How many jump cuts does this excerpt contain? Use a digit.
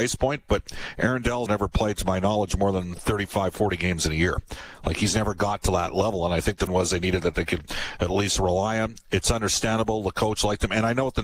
3